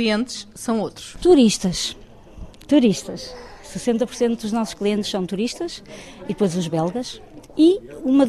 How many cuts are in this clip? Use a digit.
0